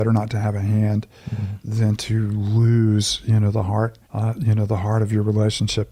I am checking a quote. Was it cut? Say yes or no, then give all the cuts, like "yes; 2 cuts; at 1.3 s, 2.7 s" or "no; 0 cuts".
yes; 1 cut; at 4.0 s